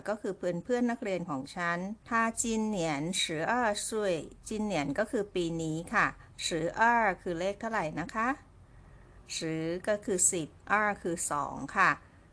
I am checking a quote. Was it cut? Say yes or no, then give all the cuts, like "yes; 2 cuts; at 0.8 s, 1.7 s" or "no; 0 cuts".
yes; 1 cut; at 2.0 s